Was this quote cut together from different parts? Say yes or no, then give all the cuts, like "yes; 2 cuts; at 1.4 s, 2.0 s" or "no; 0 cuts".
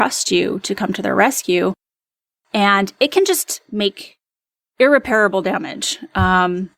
no; 0 cuts